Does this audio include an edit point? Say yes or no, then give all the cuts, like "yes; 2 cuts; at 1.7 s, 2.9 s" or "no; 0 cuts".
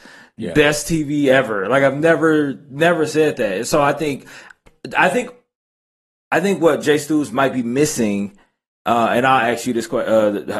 no; 0 cuts